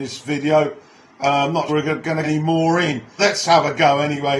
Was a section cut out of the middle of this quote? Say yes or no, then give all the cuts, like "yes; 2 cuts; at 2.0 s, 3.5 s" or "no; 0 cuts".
yes; 3 cuts; at 1.7 s, 2.2 s, 3.2 s